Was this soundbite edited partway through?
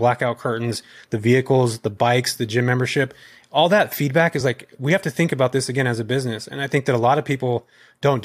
no; 0 cuts

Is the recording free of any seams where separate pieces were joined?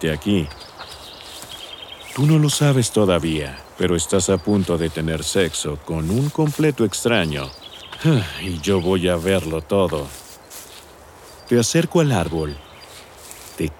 yes; 0 cuts

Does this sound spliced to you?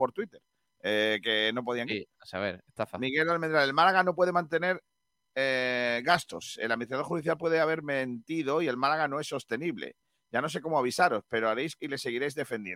yes; 1 cut; at 11.8 s

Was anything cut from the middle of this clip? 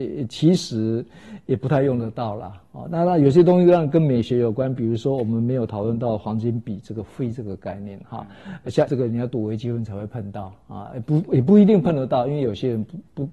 yes; 1 cut; at 8.9 s

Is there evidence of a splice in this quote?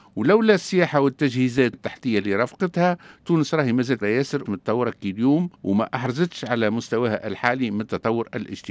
yes; 4 cuts; at 1.7 s, 4.0 s, 4.4 s, 5.5 s

